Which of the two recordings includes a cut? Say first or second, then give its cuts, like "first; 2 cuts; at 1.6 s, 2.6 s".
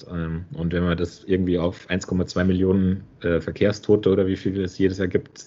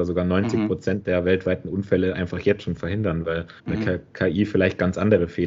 second; 1 cut; at 3.6 s